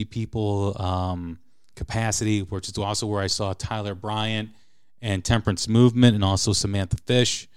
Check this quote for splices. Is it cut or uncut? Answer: uncut